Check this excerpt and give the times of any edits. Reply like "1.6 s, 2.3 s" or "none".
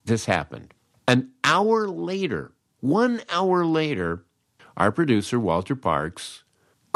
none